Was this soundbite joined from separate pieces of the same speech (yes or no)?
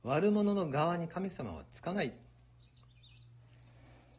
no